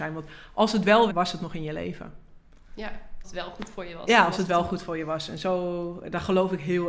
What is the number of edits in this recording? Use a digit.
2